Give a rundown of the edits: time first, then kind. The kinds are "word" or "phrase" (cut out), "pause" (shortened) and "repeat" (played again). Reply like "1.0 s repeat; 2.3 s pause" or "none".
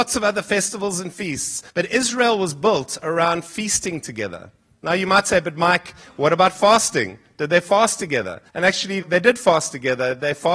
1.7 s pause; 8.5 s pause; 9.0 s word